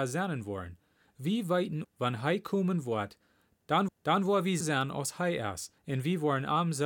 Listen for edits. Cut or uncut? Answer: cut